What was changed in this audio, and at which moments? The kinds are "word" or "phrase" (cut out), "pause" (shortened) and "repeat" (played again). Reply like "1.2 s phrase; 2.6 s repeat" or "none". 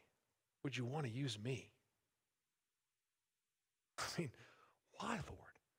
none